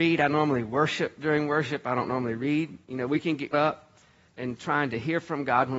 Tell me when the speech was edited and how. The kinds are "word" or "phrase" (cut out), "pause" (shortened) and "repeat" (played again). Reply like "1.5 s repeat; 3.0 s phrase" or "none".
2.8 s pause; 3.5 s word; 4.3 s word